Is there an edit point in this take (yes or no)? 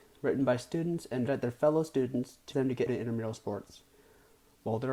yes